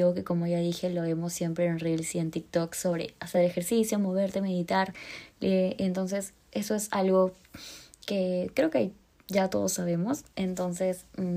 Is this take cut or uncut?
uncut